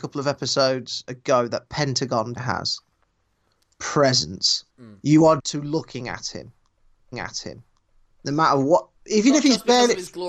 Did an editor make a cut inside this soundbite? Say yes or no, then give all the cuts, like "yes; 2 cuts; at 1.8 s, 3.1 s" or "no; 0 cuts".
yes; 5 cuts; at 2.4 s, 4.7 s, 5.4 s, 7.1 s, 9.0 s